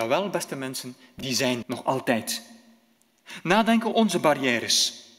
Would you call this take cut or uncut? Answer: cut